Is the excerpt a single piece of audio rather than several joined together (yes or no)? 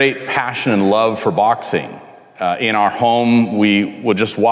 yes